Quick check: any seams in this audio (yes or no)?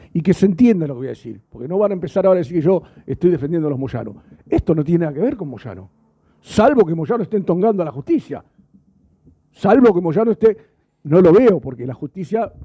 no